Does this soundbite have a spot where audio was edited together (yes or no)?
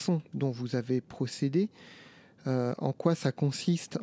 no